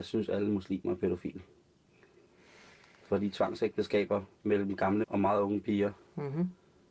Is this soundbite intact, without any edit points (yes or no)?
no